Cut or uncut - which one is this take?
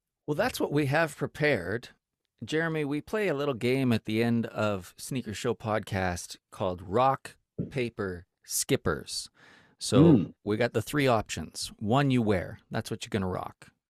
uncut